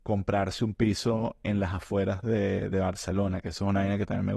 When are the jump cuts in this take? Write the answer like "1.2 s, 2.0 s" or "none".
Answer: none